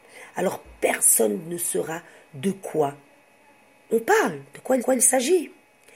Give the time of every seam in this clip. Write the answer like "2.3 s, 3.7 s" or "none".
4.8 s